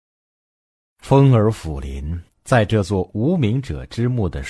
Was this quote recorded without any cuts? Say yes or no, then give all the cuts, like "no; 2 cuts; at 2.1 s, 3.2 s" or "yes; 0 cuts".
no; 1 cut; at 2.3 s